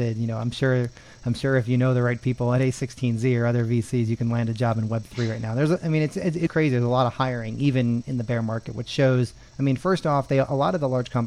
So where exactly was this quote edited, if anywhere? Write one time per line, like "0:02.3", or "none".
0:06.5
0:09.5

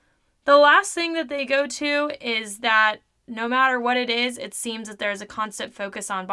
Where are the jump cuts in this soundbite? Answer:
none

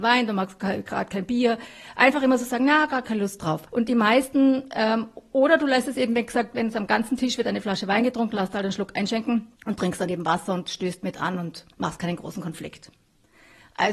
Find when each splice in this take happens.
0:03.7
0:09.6
0:11.7

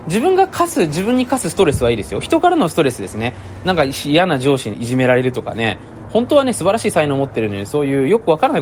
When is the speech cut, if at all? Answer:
0:04.7

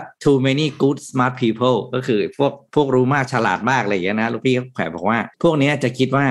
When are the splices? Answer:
0:05.3

